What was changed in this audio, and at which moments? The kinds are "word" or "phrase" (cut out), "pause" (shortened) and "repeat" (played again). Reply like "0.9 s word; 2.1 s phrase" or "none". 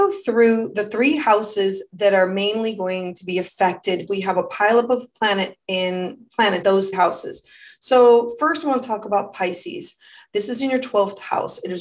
4.1 s word; 6.6 s word; 6.9 s word